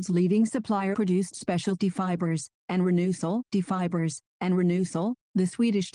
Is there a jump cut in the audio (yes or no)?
yes